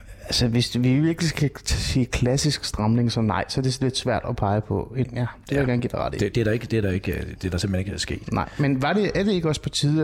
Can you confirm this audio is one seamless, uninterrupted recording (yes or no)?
no